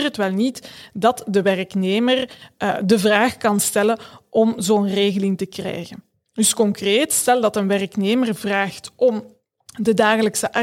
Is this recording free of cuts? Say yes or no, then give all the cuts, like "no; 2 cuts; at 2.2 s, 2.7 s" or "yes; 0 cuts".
yes; 0 cuts